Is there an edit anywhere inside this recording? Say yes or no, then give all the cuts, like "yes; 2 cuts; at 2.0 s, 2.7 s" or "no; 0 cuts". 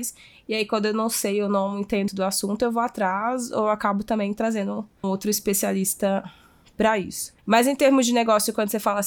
yes; 3 cuts; at 2.1 s, 5.0 s, 7.4 s